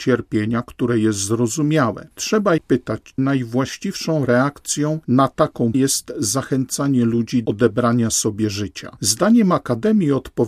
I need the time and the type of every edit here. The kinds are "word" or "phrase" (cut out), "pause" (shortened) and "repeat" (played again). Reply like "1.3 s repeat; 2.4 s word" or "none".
2.6 s word; 3.2 s word; 5.7 s word; 7.5 s word